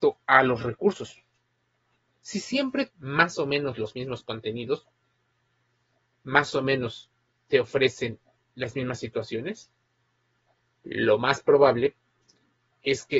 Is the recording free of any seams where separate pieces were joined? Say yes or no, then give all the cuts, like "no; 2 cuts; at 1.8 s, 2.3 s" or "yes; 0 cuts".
no; 1 cut; at 2.9 s